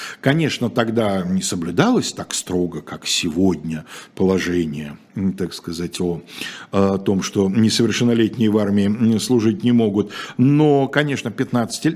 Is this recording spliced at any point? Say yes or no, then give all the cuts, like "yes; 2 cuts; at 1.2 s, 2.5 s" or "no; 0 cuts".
no; 0 cuts